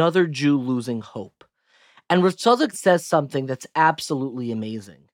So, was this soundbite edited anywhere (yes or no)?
yes